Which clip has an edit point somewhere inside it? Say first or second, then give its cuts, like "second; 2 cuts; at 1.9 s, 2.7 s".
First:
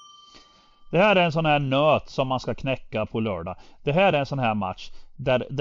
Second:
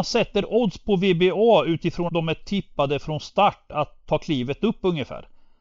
second; 1 cut; at 2.1 s